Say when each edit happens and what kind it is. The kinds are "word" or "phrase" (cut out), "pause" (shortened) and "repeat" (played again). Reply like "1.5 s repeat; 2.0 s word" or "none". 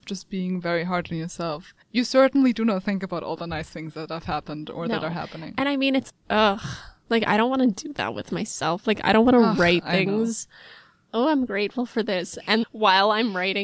1.8 s pause; 6.1 s word; 12.6 s word